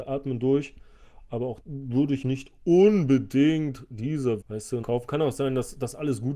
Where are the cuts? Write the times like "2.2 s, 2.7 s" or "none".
1.6 s, 2.2 s, 4.4 s, 4.8 s